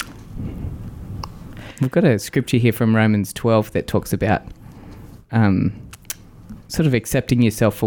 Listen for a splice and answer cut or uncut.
uncut